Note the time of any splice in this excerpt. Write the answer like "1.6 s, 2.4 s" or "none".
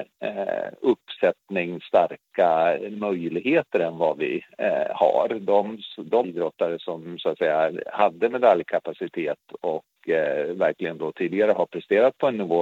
6.2 s